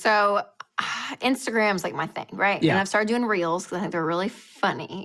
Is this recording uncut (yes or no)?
yes